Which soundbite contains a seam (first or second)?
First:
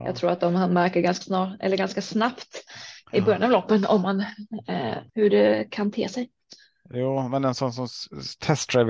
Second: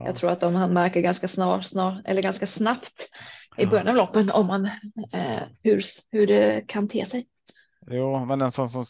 first